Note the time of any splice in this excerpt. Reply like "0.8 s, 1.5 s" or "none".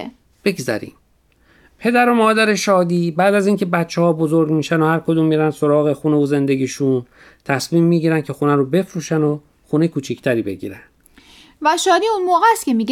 none